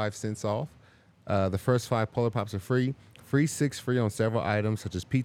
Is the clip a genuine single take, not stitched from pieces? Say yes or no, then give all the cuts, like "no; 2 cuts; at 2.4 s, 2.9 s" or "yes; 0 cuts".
yes; 0 cuts